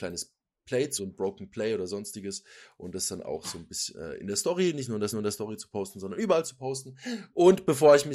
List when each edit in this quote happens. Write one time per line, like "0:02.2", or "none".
0:01.0
0:05.1